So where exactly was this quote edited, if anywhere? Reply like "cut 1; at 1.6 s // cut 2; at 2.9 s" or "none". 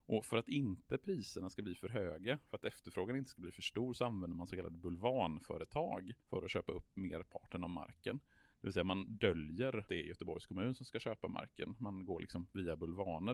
cut 1; at 6.2 s // cut 2; at 9.9 s